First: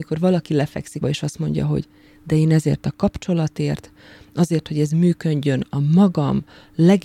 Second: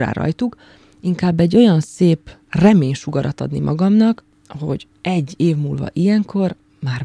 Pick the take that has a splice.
first; 1 cut; at 1.0 s

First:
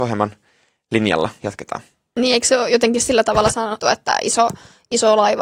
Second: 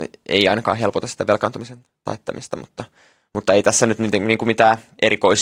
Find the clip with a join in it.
first; 2 cuts; at 1.4 s, 3.8 s

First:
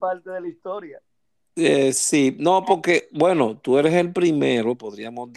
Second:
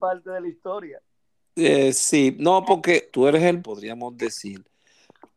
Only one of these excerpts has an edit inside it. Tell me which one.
second; 2 cuts; at 3.1 s, 3.6 s

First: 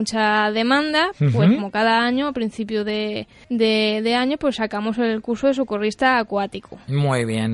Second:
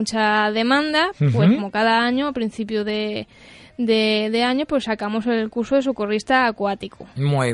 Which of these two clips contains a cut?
first; 1 cut; at 3.4 s

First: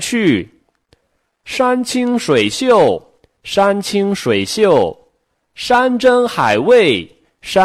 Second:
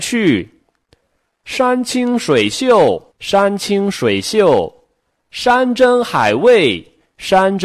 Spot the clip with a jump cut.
second; 1 cut; at 3.1 s

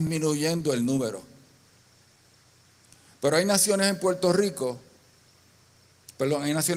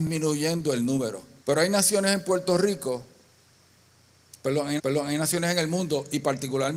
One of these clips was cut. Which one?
second; 2 cuts; at 1.4 s, 4.8 s

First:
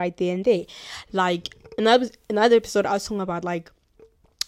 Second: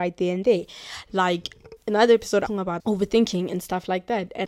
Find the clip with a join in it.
second; 3 cuts; at 1.8 s, 2.5 s, 2.8 s

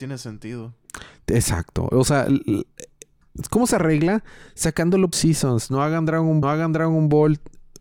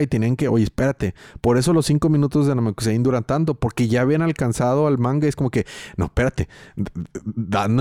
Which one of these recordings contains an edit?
first; 2 cuts; at 5.1 s, 6.4 s

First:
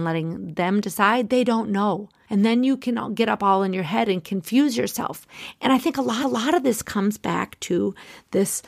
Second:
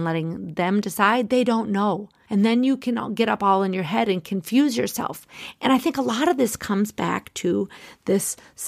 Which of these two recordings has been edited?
first; 1 cut; at 6.2 s

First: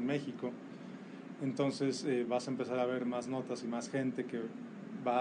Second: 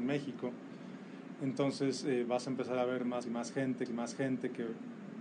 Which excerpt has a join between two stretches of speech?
second; 2 cuts; at 3.2 s, 3.9 s

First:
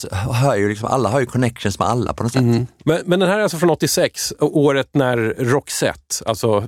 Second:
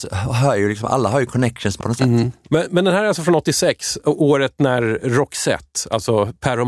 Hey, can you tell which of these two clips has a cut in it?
second; 1 cut; at 1.8 s

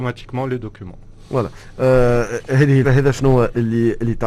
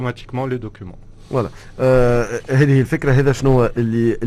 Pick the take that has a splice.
first; 1 cut; at 2.8 s

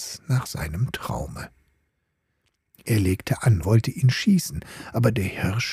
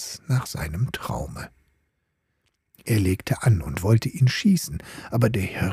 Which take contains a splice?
first; 1 cut; at 3.6 s

